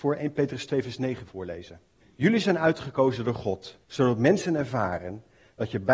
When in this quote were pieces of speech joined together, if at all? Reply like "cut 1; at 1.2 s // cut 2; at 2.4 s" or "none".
cut 1; at 1.2 s // cut 2; at 2.0 s // cut 3; at 3.8 s